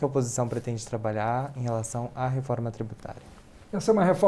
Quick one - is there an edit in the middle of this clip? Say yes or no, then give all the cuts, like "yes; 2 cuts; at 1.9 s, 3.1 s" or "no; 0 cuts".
no; 0 cuts